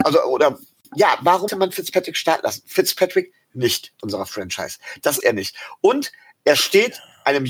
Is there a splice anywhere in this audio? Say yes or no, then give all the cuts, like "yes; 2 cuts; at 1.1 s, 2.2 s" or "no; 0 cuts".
yes; 4 cuts; at 1.5 s, 3.4 s, 4.0 s, 5.2 s